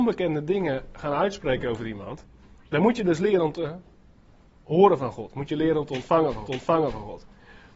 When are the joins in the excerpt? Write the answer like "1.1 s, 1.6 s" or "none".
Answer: 6.4 s